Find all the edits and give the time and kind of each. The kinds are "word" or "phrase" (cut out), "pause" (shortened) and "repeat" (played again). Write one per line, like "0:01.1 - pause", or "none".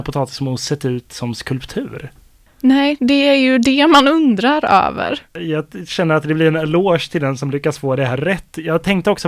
none